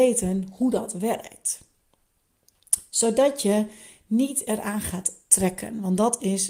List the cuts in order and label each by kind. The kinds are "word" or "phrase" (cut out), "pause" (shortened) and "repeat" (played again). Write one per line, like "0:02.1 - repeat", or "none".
none